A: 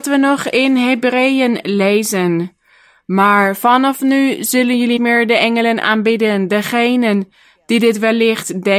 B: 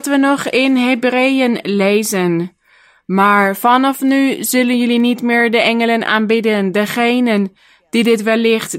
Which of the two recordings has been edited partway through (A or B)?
A